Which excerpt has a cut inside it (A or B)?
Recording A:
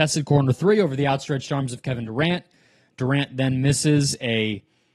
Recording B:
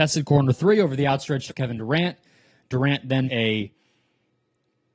B